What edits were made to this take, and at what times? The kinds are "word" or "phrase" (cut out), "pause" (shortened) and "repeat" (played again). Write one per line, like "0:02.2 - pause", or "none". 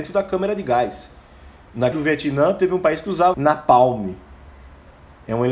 0:01.9 - word
0:03.3 - word